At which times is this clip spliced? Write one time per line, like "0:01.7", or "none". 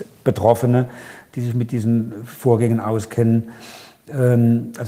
none